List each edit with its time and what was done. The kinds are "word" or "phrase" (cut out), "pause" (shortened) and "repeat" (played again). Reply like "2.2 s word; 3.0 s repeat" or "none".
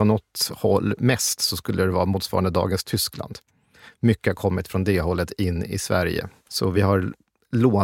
none